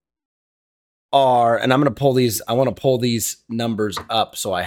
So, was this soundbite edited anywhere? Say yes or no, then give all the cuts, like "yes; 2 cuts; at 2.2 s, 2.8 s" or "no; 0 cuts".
no; 0 cuts